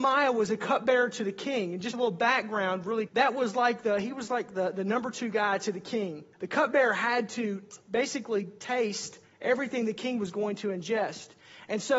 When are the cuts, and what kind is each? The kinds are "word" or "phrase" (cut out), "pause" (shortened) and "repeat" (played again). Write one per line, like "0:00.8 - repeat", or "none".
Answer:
0:01.9 - phrase
0:03.1 - word
0:06.3 - pause

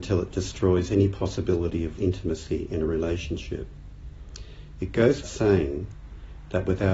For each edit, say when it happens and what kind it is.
0:02.0 - word
0:05.2 - word

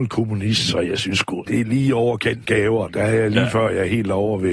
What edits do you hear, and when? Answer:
0:01.5 - word
0:02.4 - word
0:02.9 - word

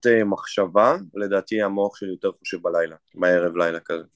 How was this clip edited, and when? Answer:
0:03.0 - pause

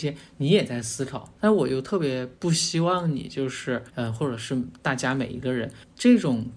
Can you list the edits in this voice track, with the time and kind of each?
0:01.4 - pause
0:02.4 - pause
0:03.9 - pause

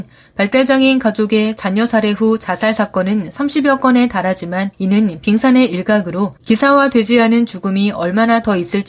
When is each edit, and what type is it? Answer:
0:04.7 - pause
0:06.4 - pause

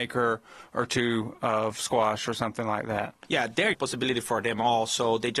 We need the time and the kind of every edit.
0:03.2 - pause
0:03.7 - phrase

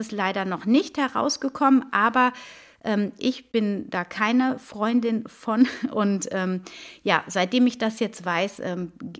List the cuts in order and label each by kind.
none

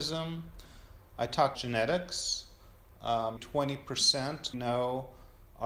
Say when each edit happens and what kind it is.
0:01.5 - word
0:03.4 - word
0:04.5 - word

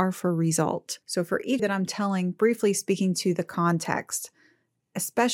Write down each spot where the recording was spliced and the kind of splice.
0:01.0 - pause
0:01.6 - word

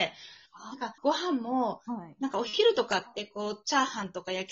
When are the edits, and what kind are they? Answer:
0:01.0 - pause

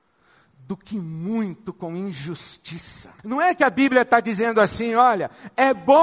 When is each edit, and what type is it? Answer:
0:03.2 - pause

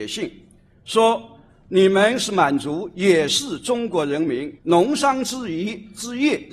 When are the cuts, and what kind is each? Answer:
0:04.6 - pause

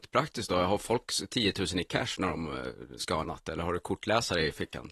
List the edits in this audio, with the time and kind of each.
0:03.2 - word

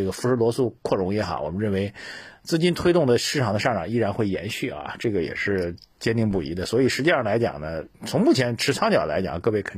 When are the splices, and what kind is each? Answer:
0:07.9 - pause

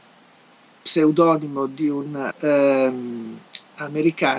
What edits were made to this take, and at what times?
0:02.3 - word

